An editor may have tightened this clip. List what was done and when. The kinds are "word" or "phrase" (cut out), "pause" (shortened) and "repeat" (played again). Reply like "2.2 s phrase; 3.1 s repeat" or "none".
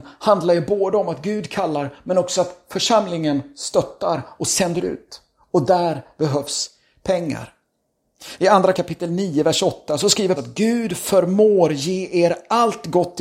8.7 s word; 10.4 s word